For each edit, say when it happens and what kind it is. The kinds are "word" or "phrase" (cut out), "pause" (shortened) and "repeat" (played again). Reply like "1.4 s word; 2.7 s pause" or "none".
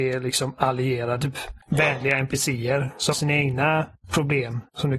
1.2 s word; 1.6 s pause; 3.1 s word